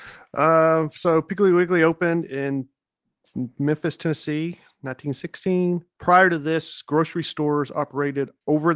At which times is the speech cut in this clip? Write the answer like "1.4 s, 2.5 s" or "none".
none